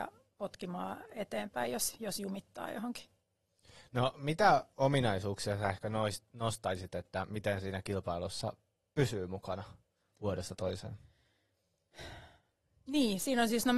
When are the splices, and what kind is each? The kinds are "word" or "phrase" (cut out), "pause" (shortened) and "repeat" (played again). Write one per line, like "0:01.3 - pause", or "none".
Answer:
none